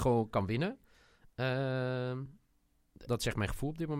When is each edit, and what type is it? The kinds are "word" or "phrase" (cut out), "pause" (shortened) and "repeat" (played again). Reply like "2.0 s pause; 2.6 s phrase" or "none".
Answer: 3.1 s word